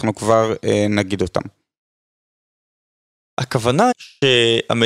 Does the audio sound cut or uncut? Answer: cut